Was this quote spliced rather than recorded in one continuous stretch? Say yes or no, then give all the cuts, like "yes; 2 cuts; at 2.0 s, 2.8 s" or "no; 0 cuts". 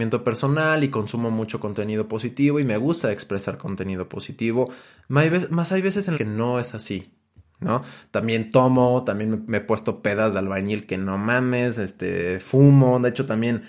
yes; 1 cut; at 6.1 s